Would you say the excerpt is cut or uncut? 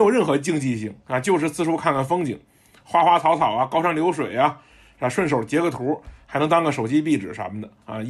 cut